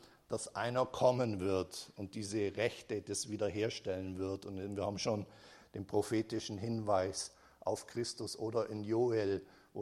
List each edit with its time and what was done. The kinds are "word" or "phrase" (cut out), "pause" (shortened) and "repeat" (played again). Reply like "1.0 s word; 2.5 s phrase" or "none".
none